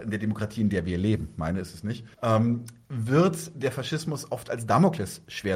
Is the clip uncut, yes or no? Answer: no